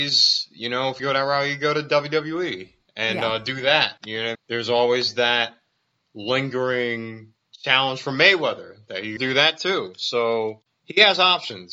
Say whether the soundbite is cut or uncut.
cut